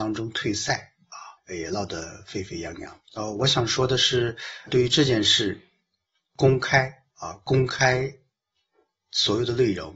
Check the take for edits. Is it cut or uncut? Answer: cut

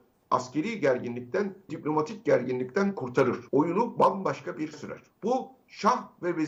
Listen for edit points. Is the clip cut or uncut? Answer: cut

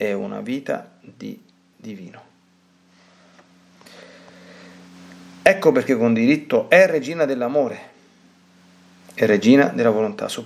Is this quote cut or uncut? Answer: cut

